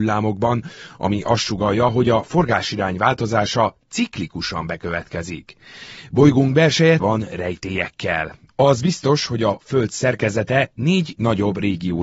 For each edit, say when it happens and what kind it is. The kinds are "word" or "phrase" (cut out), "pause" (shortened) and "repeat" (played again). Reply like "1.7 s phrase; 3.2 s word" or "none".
7.0 s word